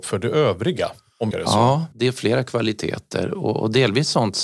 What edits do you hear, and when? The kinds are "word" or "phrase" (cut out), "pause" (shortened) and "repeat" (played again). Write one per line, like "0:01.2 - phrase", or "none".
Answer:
0:01.3 - phrase
0:01.9 - pause